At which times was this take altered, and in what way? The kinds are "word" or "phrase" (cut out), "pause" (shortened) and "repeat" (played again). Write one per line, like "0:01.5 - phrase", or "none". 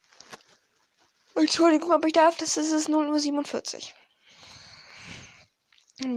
none